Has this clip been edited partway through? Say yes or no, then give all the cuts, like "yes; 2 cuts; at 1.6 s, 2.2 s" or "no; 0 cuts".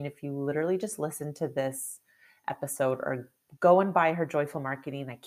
no; 0 cuts